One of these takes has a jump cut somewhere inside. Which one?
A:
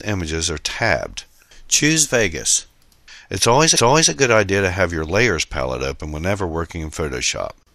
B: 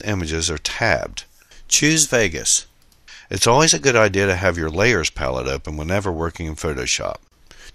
A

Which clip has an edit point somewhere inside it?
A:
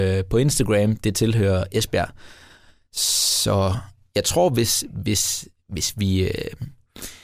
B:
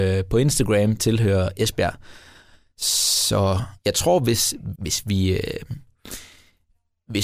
B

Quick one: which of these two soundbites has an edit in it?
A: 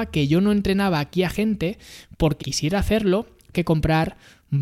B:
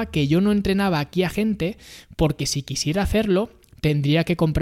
A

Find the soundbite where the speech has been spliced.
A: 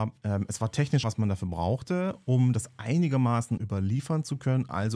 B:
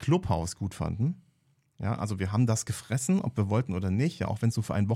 A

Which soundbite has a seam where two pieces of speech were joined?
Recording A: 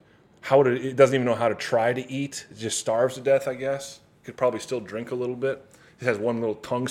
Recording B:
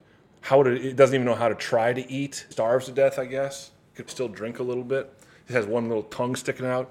B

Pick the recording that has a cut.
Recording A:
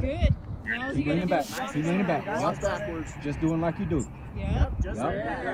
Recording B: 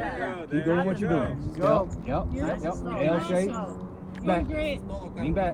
B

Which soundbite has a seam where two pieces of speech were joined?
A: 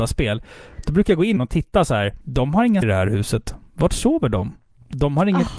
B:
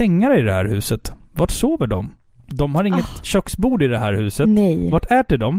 A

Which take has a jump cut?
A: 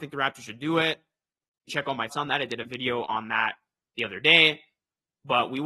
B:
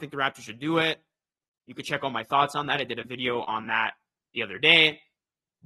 A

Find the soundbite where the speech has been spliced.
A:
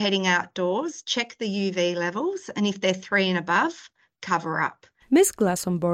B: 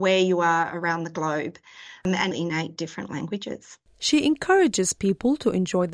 B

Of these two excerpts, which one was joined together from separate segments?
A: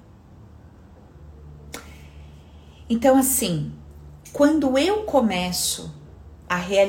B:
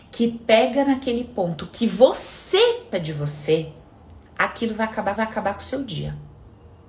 B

